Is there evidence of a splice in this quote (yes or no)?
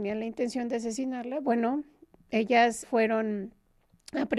yes